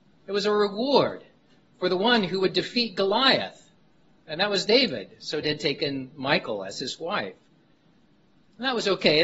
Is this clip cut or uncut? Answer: cut